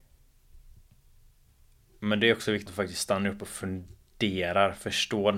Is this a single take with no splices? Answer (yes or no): no